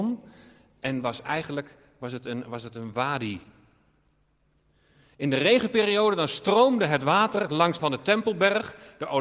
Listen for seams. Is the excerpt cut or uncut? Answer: cut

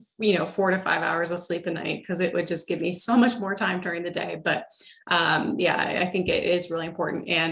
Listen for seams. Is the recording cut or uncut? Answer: uncut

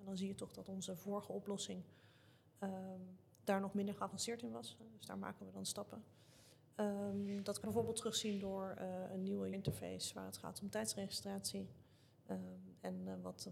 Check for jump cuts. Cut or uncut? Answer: cut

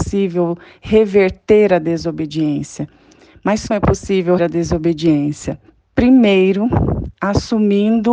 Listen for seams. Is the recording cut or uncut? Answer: cut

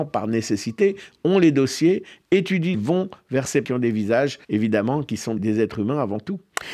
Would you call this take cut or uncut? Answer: cut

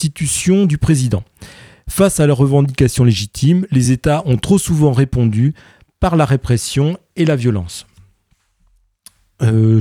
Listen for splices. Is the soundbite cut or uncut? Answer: uncut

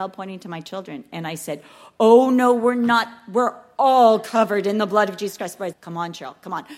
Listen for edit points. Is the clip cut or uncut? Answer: cut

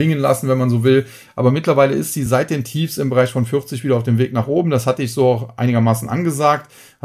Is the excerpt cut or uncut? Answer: uncut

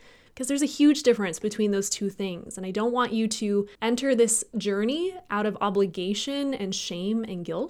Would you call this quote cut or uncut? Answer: cut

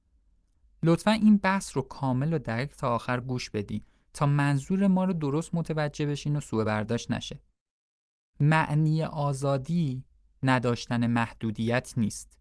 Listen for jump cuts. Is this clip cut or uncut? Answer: uncut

